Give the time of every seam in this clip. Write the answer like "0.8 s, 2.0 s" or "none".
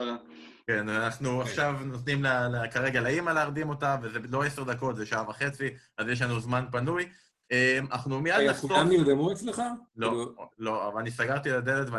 9.9 s